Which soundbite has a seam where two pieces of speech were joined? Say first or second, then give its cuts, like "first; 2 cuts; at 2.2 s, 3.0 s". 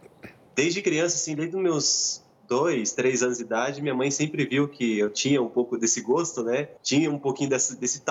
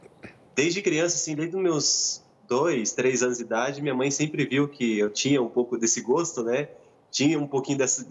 first; 1 cut; at 6.8 s